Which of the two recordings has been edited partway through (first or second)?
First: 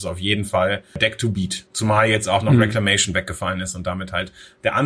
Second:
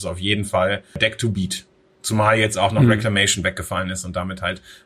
first